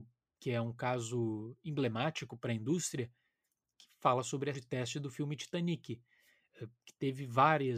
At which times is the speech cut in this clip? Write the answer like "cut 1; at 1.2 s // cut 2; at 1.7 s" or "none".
cut 1; at 4.5 s